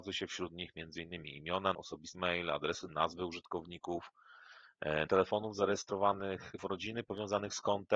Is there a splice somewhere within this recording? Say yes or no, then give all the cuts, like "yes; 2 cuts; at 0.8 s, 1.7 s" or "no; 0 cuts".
yes; 5 cuts; at 1.7 s, 2.1 s, 2.9 s, 5.1 s, 6.6 s